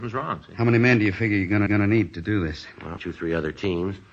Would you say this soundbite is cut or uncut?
cut